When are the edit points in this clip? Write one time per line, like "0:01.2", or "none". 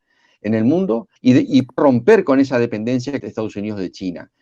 0:01.2
0:01.8
0:03.2